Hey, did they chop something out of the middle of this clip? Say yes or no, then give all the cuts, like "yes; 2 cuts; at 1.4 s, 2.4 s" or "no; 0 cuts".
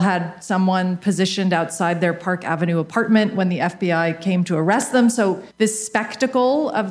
yes; 1 cut; at 5.5 s